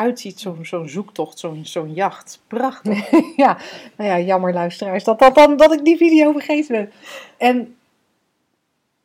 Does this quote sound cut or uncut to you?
uncut